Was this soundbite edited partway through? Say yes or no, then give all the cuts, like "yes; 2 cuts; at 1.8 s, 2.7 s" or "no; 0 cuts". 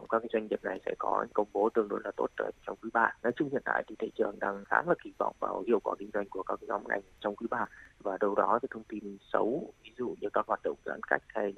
yes; 2 cuts; at 3.2 s, 8.6 s